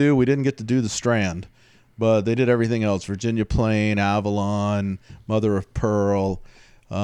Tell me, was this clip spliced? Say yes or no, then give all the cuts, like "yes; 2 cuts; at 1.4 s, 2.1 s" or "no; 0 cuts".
no; 0 cuts